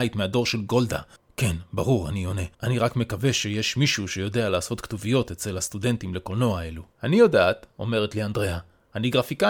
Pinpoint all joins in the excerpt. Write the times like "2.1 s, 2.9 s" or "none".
1.2 s, 2.5 s, 6.9 s